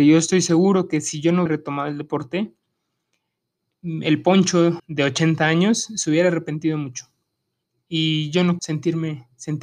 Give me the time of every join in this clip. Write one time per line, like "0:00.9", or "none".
0:01.5
0:04.8
0:08.6